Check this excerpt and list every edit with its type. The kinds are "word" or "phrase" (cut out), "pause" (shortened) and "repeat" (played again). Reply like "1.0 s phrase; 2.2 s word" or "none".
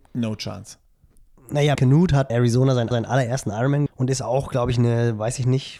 1.7 s word; 2.3 s word; 2.9 s repeat; 3.9 s word